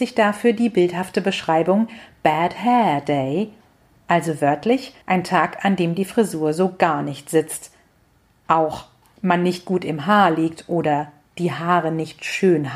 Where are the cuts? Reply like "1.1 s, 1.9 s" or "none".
5.0 s